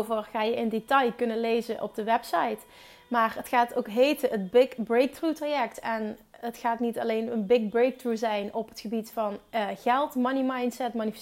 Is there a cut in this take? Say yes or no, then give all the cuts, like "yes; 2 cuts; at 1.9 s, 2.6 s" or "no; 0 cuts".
no; 0 cuts